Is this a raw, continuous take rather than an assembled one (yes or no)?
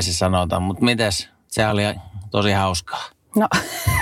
yes